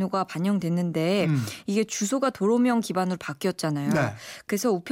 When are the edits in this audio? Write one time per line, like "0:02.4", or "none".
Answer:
none